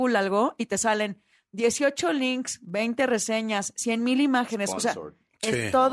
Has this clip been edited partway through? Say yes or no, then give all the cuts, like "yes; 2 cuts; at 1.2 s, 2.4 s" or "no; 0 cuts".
no; 0 cuts